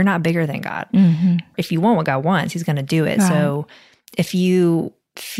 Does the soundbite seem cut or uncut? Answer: uncut